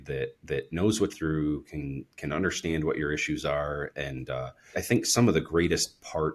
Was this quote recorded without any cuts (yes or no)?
no